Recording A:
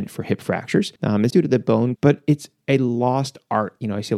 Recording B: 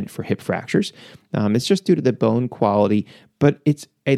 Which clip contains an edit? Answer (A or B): A